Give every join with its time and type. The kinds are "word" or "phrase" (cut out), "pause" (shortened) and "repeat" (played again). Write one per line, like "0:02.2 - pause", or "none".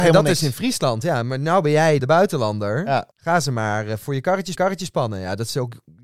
0:02.0 - word
0:03.1 - pause
0:04.5 - repeat